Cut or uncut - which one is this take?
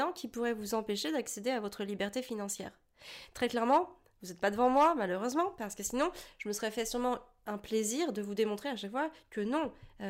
uncut